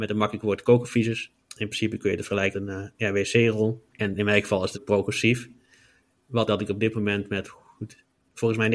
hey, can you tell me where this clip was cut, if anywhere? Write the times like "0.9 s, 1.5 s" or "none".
1.4 s, 2.5 s, 3.9 s, 4.7 s, 6.5 s, 7.4 s

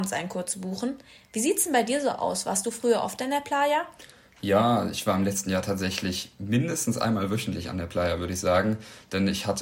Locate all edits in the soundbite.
none

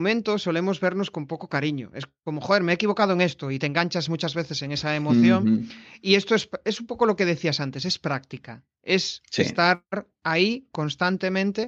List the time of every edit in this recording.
none

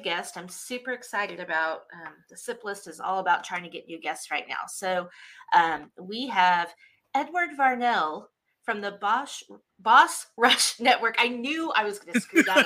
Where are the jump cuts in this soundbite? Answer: none

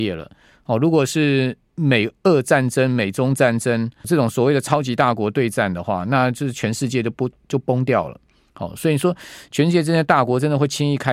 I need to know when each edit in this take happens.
4.0 s

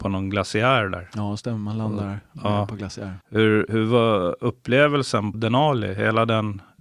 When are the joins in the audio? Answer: 3.2 s, 5.3 s

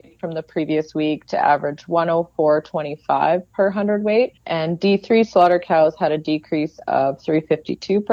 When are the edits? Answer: 4.4 s

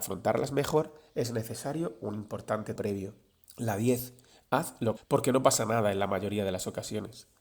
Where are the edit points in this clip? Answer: 2.8 s, 3.4 s, 5.0 s

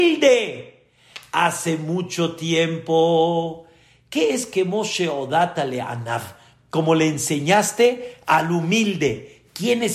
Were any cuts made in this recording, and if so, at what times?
none

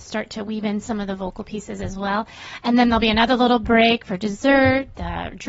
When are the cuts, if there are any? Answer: none

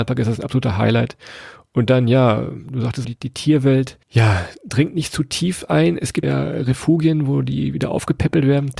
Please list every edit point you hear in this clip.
3.0 s, 4.0 s, 6.2 s

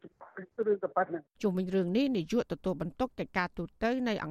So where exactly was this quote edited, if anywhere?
1.3 s

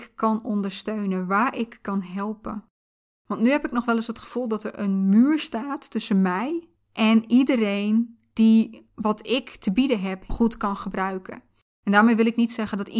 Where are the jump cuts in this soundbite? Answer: 10.3 s

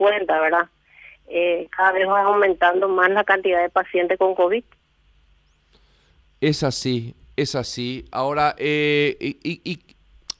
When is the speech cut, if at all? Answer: none

